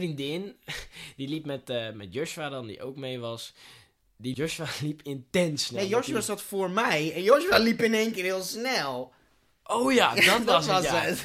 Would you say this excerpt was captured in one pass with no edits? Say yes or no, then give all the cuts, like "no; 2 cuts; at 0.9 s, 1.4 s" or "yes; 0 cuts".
no; 1 cut; at 4.3 s